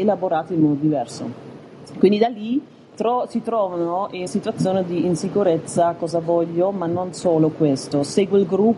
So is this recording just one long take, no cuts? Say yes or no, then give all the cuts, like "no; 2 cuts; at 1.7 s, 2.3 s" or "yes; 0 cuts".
no; 1 cut; at 4.3 s